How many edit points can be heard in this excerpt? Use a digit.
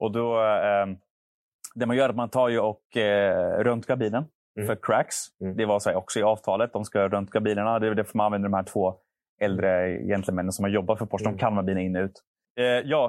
0